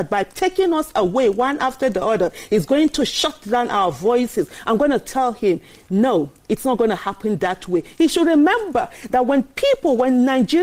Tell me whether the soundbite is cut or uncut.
uncut